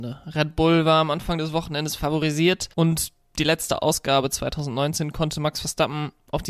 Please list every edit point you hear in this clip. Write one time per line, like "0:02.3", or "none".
0:02.7